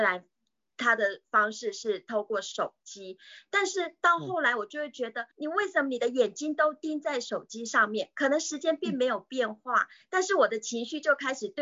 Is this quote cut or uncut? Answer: cut